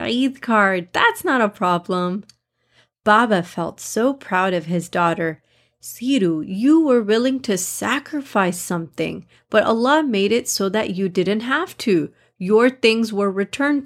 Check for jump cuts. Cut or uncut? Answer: uncut